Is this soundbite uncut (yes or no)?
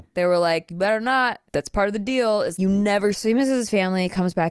no